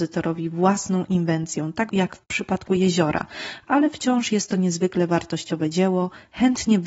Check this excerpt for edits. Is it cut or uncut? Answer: cut